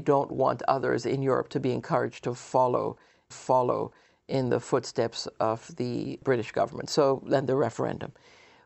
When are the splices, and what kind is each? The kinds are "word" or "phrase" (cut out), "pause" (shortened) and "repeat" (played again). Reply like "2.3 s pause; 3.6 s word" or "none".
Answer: 3.3 s repeat